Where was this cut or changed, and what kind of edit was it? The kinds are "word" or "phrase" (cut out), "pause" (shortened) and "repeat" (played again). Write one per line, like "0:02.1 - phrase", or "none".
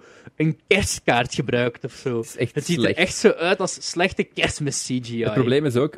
none

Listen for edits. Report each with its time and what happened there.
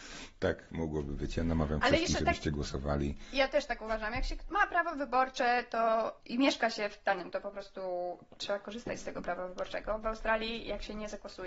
0:06.2 - pause
0:07.3 - word

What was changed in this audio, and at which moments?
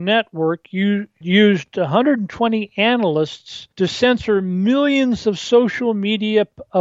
0:01.2 - word
0:03.7 - pause

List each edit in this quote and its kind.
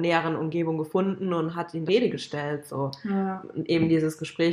0:01.9 - phrase

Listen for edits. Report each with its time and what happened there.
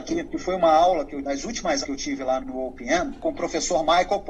0:01.2 - word
0:01.8 - word
0:02.4 - word

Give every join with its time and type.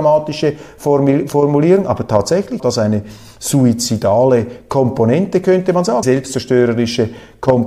0:02.6 - word
0:06.0 - word

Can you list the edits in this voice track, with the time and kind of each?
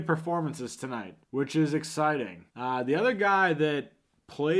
0:01.2 - pause
0:02.5 - pause

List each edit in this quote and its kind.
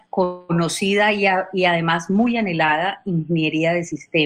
none

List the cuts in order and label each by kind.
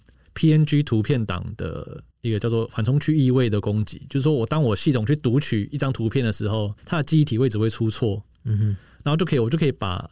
0:02.1 - pause
0:06.8 - pause

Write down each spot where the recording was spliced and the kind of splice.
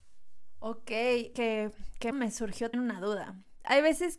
0:01.3 - phrase
0:02.1 - phrase
0:02.7 - word

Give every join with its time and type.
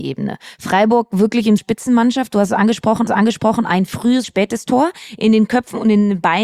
0:01.6 - phrase
0:03.1 - repeat
0:04.2 - phrase

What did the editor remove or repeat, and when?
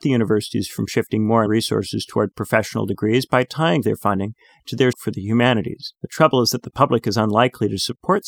0:01.5 - word
0:03.8 - phrase
0:04.9 - word
0:05.9 - pause

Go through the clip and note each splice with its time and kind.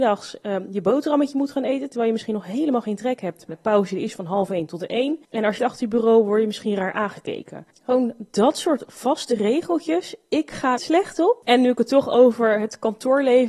0:03.5 - word
0:05.2 - pause
0:05.6 - phrase
0:10.8 - phrase

